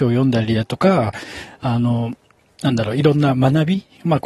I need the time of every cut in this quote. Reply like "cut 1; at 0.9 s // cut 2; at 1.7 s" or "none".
none